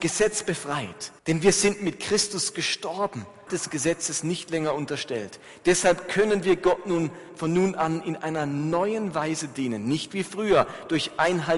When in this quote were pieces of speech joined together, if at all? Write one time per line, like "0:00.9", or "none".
0:01.2
0:03.5